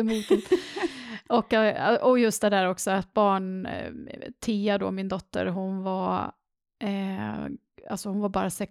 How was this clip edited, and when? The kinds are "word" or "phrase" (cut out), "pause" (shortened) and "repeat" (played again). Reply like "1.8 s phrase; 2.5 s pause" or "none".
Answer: none